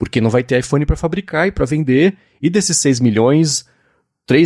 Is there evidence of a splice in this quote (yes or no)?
no